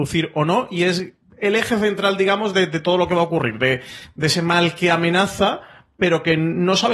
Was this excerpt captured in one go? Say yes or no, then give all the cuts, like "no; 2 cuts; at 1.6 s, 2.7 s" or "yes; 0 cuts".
yes; 0 cuts